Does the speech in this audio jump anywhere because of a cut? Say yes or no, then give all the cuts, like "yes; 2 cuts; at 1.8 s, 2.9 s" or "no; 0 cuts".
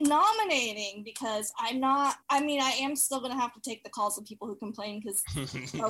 no; 0 cuts